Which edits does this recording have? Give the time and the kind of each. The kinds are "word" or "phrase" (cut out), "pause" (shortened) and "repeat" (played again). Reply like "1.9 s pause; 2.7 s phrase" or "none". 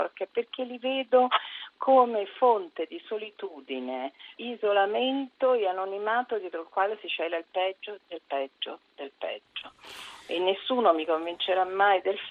4.4 s word